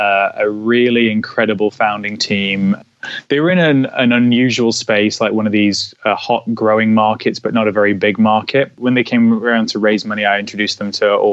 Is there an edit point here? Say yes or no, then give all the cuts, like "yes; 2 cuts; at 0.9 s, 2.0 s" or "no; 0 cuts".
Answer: no; 0 cuts